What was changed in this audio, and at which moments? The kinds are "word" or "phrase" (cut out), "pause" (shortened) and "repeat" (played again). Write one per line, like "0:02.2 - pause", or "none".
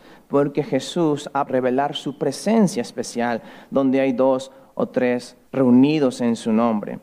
0:01.5 - word
0:05.5 - pause